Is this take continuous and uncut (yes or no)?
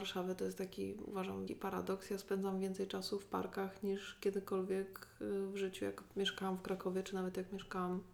no